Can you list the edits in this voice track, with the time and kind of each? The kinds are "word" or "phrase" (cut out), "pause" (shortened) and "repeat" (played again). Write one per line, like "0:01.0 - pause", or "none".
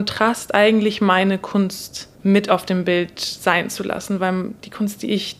0:02.1 - pause